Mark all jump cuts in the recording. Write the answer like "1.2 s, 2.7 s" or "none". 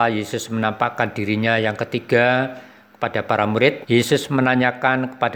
3.8 s